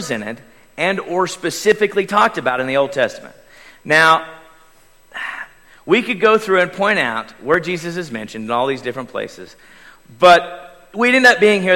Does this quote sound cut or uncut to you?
uncut